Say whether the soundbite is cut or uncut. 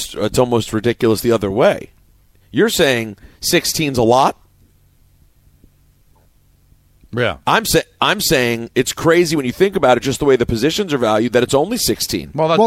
uncut